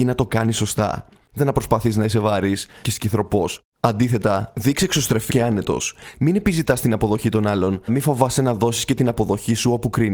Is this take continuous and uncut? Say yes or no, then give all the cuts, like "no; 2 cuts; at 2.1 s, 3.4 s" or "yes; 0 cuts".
no; 4 cuts; at 1.4 s, 2.8 s, 5.3 s, 7.9 s